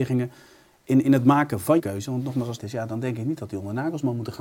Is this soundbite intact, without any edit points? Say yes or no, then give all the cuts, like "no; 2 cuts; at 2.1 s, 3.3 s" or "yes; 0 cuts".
no; 2 cuts; at 1.8 s, 2.6 s